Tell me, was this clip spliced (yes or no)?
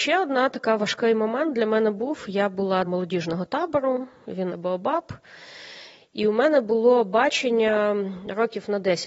yes